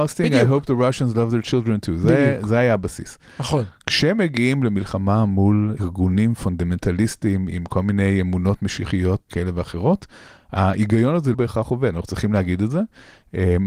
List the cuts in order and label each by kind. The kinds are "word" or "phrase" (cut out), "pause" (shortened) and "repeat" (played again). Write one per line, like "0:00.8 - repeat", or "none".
0:05.8 - word
0:07.5 - word
0:09.3 - word
0:11.3 - word

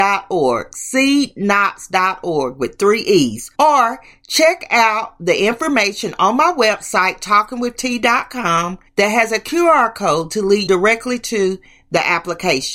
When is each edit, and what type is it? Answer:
0:03.5 - pause
0:08.9 - pause
0:10.7 - word

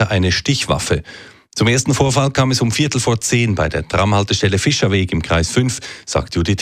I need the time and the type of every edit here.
none

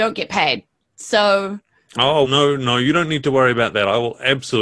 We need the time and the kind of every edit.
0:02.2 - word

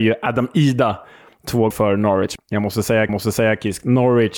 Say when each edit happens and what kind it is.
0:01.7 - word
0:02.4 - word
0:03.1 - repeat

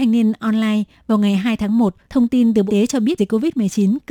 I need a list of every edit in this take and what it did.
0:02.0 - pause
0:02.7 - word
0:03.2 - word

